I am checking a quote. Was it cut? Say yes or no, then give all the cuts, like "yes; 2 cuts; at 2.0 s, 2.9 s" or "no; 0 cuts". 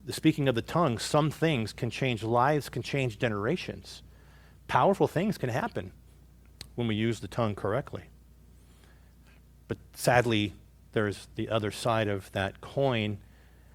no; 0 cuts